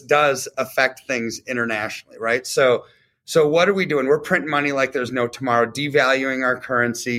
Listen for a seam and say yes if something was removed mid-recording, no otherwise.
no